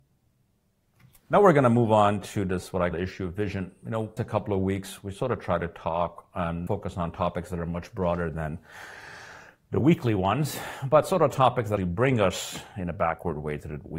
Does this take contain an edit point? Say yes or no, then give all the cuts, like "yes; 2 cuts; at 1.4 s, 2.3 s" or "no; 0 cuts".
yes; 4 cuts; at 2.9 s, 4.2 s, 6.7 s, 11.8 s